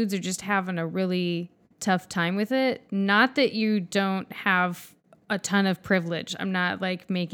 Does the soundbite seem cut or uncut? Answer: uncut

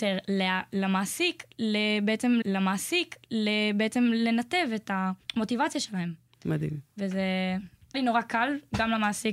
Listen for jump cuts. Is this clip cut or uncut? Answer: cut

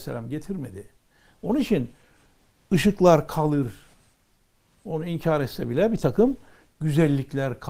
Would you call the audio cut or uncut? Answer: uncut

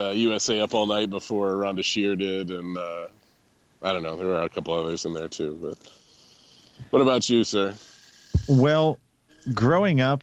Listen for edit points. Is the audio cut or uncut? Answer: cut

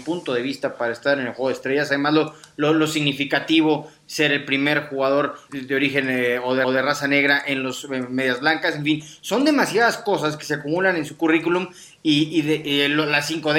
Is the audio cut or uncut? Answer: cut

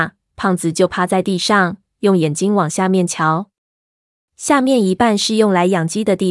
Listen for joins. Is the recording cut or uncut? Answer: uncut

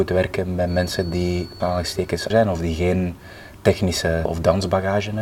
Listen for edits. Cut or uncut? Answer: cut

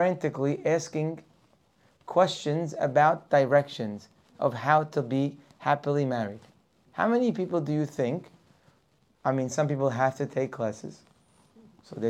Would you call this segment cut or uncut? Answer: uncut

